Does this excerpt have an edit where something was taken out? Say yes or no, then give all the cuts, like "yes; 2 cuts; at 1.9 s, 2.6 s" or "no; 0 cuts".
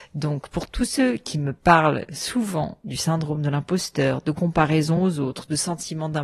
no; 0 cuts